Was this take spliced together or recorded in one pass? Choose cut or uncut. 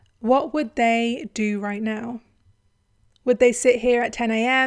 uncut